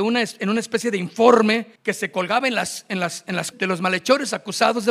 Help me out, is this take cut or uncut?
cut